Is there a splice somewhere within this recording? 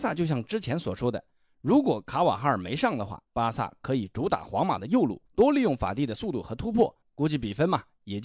yes; 2 cuts; at 3.2 s, 5.3 s

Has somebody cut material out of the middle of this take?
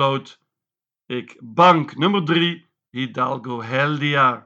no; 0 cuts

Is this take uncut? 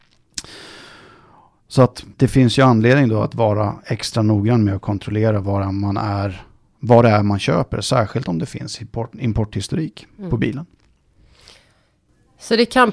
no; 1 cut; at 2.1 s

